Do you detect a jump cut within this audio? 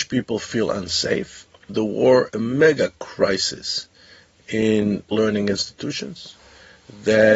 yes; 3 cuts; at 1.7 s, 2.3 s, 5.1 s

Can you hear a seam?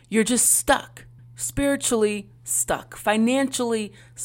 yes; 1 cut; at 1.2 s

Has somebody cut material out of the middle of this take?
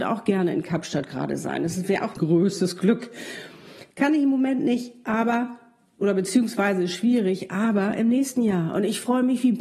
yes; 1 cut; at 2.2 s

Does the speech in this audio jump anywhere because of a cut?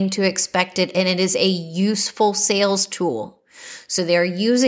no; 0 cuts

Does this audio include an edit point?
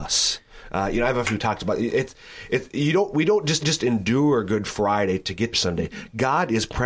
yes; 3 cuts; at 1.2 s, 3.6 s, 5.5 s

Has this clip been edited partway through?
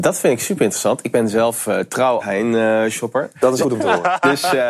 yes; 2 cuts; at 2.2 s, 3.6 s

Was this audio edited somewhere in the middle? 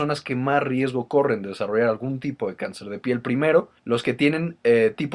yes; 1 cut; at 3.8 s

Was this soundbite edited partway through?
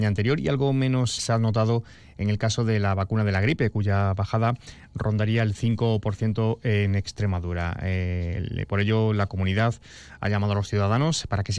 yes; 1 cut; at 1.2 s

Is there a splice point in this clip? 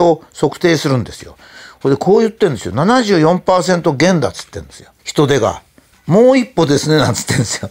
yes; 2 cuts; at 5.0 s, 5.9 s

